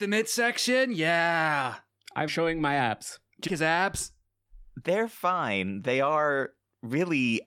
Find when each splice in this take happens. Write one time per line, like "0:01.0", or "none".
0:02.3
0:03.5